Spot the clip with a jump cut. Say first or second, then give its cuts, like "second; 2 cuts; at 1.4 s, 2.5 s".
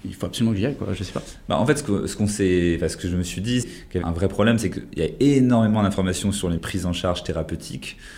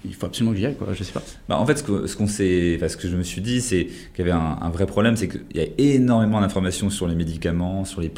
first; 3 cuts; at 3.6 s, 4.0 s, 6.6 s